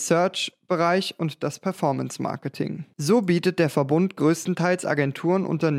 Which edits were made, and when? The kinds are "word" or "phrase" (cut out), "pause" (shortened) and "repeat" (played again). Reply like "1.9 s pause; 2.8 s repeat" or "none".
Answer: none